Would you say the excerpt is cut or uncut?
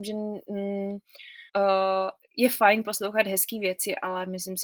cut